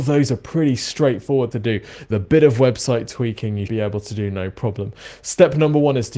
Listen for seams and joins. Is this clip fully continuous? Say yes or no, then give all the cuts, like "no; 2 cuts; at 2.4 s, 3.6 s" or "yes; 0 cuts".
no; 3 cuts; at 1.5 s, 2.1 s, 3.7 s